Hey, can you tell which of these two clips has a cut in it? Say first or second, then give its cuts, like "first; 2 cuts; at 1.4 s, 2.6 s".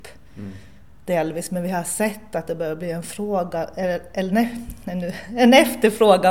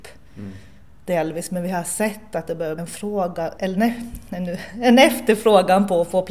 second; 2 cuts; at 2.8 s, 3.6 s